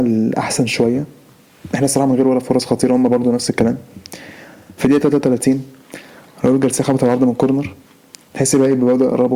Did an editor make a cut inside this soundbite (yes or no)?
no